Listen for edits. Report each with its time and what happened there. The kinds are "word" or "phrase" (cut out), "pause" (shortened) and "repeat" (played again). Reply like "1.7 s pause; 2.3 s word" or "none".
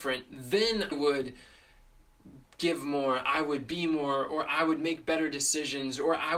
0.9 s word; 2.5 s pause